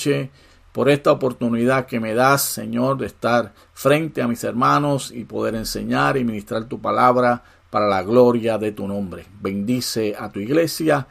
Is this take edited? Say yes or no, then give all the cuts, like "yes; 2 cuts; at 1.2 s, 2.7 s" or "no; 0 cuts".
no; 0 cuts